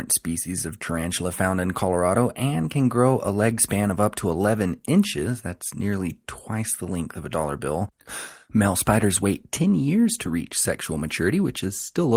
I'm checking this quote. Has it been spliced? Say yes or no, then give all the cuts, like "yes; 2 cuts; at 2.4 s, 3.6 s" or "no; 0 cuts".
no; 0 cuts